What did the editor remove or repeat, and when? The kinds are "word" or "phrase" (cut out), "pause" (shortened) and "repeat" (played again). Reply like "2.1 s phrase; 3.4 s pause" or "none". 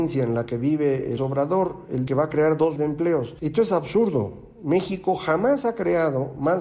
1.2 s word; 2.1 s word; 2.8 s word